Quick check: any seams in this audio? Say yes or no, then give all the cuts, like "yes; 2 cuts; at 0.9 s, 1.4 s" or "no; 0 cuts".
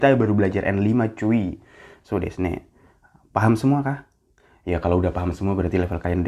no; 0 cuts